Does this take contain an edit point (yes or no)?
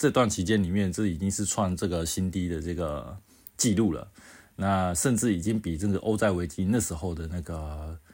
no